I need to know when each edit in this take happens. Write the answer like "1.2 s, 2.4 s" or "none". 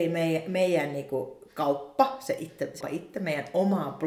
2.8 s